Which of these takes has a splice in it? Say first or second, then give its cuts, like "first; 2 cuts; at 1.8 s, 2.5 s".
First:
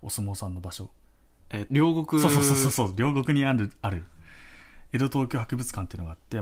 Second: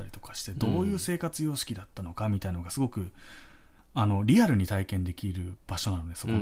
first; 2 cuts; at 1.0 s, 1.7 s